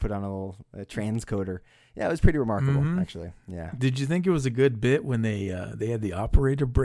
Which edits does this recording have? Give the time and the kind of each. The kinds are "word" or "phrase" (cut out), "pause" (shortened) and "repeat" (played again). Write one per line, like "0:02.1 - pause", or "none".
none